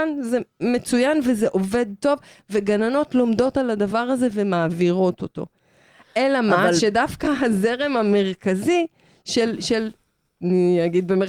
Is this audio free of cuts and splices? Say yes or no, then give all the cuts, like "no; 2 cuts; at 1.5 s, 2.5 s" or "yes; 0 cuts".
yes; 0 cuts